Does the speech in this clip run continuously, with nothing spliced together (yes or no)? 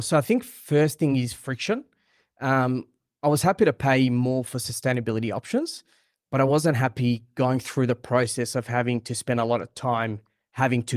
yes